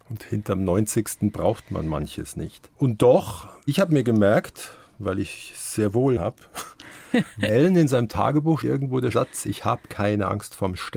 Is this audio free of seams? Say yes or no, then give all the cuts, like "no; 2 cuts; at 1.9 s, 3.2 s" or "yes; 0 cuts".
no; 6 cuts; at 2.7 s, 4.9 s, 6.2 s, 7.5 s, 8.6 s, 9.1 s